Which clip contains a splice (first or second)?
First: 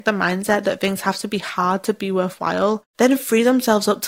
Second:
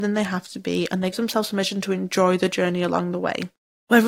second